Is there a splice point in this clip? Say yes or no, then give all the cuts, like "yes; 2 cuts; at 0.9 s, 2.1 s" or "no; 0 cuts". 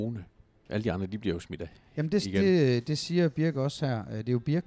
no; 0 cuts